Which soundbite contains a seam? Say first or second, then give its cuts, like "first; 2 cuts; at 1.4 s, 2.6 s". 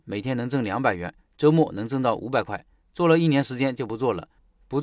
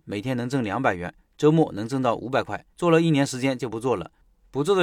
second; 1 cut; at 2.7 s